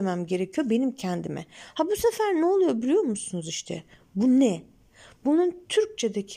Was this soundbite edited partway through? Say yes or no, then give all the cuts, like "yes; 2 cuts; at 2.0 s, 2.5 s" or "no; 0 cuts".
no; 0 cuts